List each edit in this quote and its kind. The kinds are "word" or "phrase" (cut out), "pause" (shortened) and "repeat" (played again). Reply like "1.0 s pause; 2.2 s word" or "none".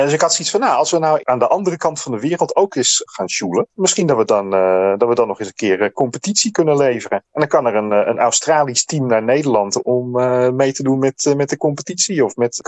3.7 s pause; 7.2 s pause